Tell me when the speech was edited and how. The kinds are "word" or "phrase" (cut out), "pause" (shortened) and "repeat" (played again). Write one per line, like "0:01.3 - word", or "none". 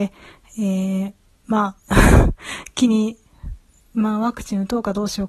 none